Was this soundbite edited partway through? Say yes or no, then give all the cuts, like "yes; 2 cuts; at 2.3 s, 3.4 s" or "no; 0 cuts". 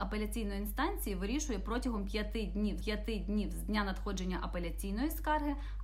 yes; 1 cut; at 2.8 s